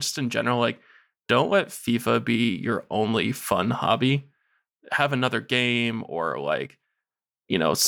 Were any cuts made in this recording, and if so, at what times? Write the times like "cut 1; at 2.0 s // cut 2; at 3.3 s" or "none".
none